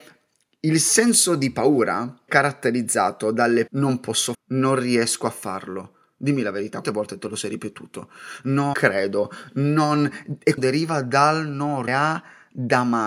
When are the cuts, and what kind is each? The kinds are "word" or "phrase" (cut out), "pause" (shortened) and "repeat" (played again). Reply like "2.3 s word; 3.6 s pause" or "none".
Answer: 2.3 s word; 3.7 s word; 4.3 s word; 6.8 s word; 8.7 s word; 10.6 s word; 11.9 s word